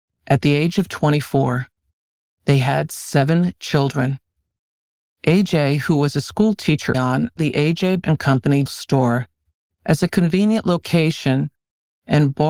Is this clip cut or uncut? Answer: cut